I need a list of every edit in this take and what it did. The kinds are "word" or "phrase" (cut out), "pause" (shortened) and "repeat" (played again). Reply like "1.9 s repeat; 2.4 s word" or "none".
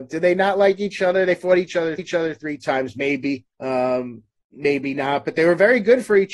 2.0 s repeat; 3.5 s pause